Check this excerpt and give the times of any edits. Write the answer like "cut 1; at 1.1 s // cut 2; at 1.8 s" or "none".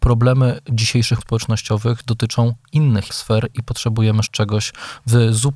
cut 1; at 1.2 s // cut 2; at 3.1 s // cut 3; at 4.3 s